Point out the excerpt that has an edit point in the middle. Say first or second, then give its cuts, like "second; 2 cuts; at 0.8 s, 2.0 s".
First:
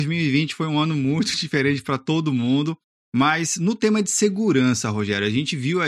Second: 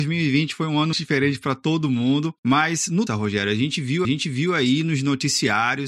second; 4 cuts; at 0.9 s, 2.4 s, 3.1 s, 4.0 s